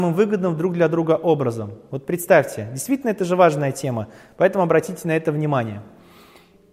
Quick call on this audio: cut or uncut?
uncut